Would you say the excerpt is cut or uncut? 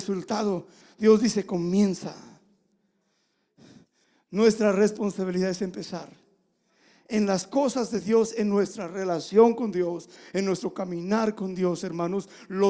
uncut